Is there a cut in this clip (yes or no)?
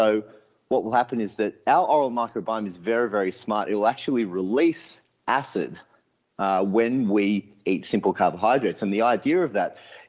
no